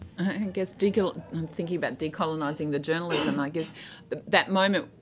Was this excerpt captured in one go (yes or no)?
yes